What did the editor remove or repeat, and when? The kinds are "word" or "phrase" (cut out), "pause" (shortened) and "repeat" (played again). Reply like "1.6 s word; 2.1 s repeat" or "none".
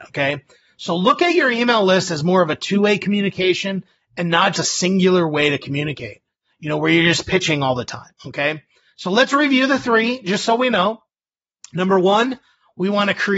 4.5 s word; 8.2 s pause